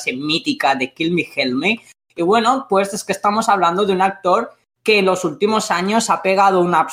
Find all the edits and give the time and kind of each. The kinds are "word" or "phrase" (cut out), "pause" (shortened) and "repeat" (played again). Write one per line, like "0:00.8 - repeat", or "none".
none